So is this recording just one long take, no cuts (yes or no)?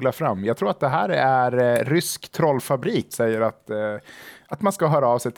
no